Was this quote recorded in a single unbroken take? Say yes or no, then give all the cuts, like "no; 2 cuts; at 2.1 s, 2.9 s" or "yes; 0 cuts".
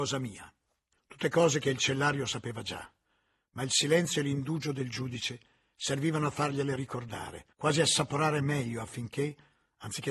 no; 1 cut; at 7.5 s